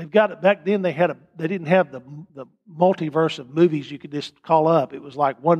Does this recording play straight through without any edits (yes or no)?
no